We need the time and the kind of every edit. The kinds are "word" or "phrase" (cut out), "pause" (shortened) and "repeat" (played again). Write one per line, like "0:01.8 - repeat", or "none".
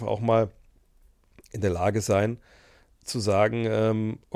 none